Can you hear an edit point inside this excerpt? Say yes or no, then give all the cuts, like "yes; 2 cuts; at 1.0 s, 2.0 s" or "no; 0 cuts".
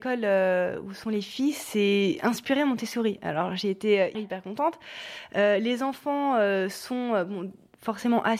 yes; 1 cut; at 4.1 s